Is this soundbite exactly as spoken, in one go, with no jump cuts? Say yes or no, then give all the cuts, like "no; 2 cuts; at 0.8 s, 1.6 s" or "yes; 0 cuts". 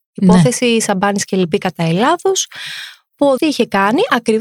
no; 1 cut; at 3.4 s